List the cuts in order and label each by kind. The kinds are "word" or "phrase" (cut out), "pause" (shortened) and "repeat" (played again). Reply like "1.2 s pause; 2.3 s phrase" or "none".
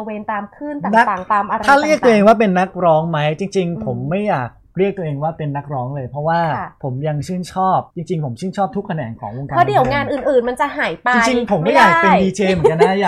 7.9 s pause